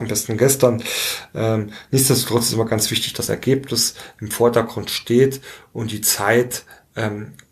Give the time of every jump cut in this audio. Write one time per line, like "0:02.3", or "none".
0:03.3